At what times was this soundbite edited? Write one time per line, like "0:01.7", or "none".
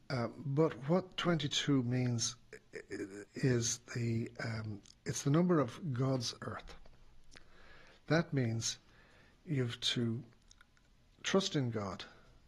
0:03.3
0:04.9
0:06.4